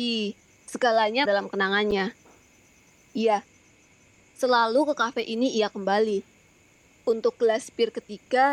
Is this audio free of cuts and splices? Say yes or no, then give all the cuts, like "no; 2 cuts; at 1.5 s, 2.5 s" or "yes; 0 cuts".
no; 1 cut; at 1.3 s